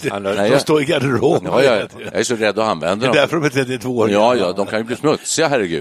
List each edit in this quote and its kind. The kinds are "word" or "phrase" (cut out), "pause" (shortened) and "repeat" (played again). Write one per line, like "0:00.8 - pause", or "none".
0:04.4 - word